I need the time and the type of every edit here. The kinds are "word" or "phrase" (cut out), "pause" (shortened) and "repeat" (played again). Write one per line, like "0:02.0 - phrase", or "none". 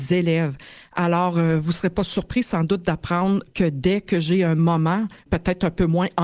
0:05.2 - pause

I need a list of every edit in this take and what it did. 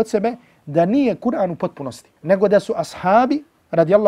0:02.2 - pause

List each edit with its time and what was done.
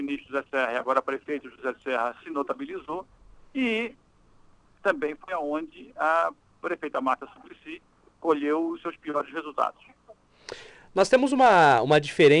none

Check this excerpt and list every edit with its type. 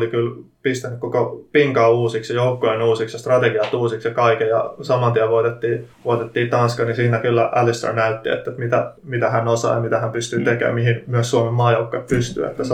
0:05.9 - pause
0:09.0 - pause

